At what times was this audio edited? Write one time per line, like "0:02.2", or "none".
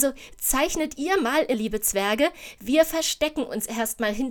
0:01.5